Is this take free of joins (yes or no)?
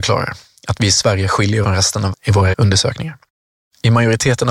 no